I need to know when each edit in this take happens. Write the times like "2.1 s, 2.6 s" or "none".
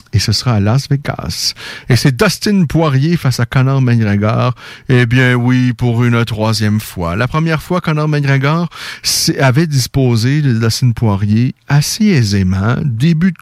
none